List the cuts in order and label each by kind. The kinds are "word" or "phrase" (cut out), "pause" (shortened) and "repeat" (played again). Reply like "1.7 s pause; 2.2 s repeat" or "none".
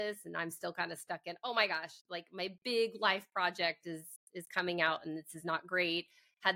2.0 s pause